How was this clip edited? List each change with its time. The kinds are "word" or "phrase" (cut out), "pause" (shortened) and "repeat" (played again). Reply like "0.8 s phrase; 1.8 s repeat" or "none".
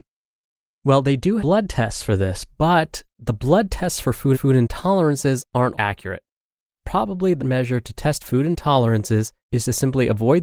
1.4 s word; 3.1 s pause; 4.3 s repeat; 5.7 s word; 7.4 s phrase; 9.4 s pause